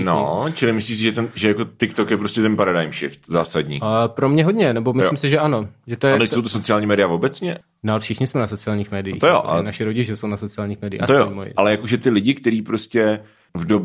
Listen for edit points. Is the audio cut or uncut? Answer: uncut